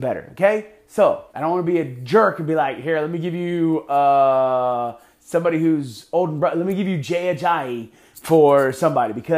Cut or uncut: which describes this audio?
cut